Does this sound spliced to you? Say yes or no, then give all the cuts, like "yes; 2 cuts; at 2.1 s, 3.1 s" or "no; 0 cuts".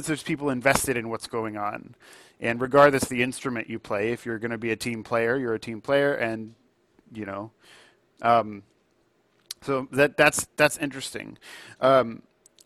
no; 0 cuts